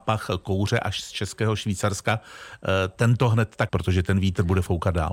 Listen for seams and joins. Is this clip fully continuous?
no; 1 cut; at 3.7 s

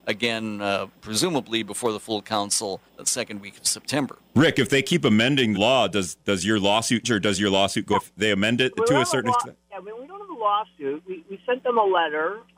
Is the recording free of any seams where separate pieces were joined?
no; 7 cuts; at 1.0 s, 2.9 s, 5.5 s, 7.0 s, 7.9 s, 9.6 s, 11.2 s

